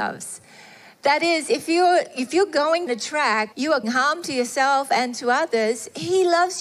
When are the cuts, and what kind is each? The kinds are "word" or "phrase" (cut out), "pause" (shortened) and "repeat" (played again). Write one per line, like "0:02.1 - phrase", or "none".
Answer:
0:02.9 - word
0:03.5 - word
0:03.8 - word